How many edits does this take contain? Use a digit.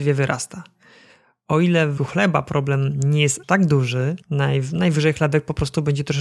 3